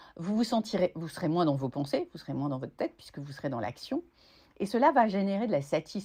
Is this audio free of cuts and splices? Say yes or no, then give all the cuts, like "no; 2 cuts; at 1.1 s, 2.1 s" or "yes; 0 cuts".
yes; 0 cuts